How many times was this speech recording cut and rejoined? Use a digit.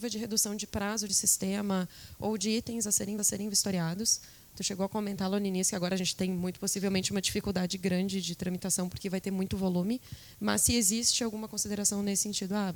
2